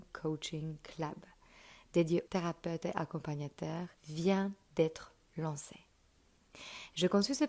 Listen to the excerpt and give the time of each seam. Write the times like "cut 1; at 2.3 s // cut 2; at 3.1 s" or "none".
cut 1; at 2.3 s // cut 2; at 4.0 s